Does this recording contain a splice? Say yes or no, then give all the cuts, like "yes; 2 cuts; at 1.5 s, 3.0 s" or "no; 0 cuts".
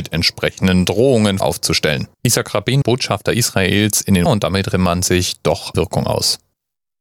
yes; 6 cuts; at 1.4 s, 2.1 s, 2.8 s, 4.3 s, 4.7 s, 5.7 s